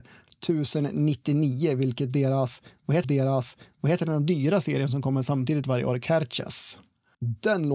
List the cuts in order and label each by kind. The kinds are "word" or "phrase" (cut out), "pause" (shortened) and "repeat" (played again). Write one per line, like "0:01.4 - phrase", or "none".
0:03.0 - repeat